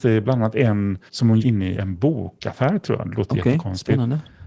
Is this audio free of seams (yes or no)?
no